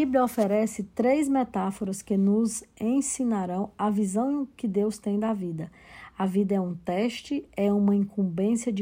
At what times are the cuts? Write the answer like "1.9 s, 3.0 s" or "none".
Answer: none